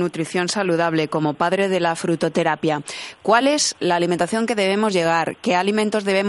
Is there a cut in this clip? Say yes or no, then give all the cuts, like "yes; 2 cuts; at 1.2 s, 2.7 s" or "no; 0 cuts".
no; 0 cuts